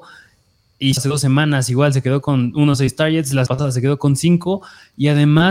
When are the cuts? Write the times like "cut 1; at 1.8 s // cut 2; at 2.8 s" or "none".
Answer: cut 1; at 1.0 s // cut 2; at 3.5 s